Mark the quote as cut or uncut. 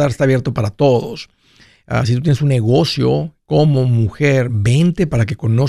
uncut